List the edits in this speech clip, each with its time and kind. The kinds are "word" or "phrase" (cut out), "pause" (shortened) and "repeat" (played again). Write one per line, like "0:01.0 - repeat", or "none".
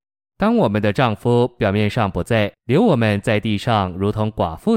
0:02.6 - pause